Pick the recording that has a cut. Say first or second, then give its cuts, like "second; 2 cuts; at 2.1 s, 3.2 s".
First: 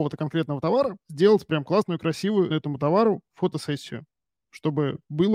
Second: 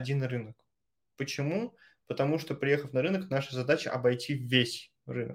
first; 1 cut; at 2.5 s